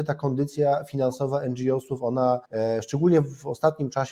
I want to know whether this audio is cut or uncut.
cut